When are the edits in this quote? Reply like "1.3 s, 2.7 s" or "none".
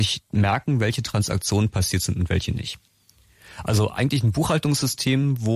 none